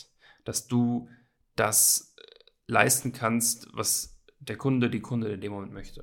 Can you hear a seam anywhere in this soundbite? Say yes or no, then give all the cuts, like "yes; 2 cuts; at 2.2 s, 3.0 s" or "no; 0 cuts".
no; 0 cuts